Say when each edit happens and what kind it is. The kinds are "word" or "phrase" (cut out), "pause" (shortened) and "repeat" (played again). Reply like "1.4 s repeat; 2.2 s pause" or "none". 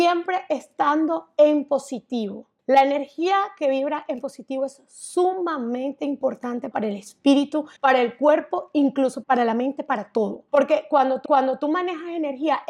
2.6 s pause; 6.7 s phrase; 7.8 s pause; 9.2 s word; 10.5 s pause; 11.2 s repeat